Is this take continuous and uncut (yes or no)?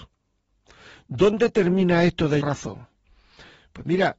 no